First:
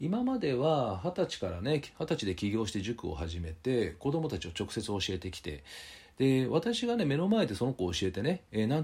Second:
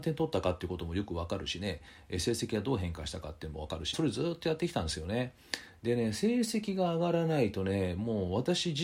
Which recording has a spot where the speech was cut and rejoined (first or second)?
second